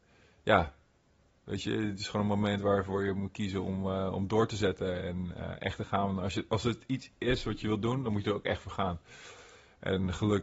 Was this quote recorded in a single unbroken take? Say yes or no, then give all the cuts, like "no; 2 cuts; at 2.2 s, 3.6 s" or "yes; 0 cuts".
yes; 0 cuts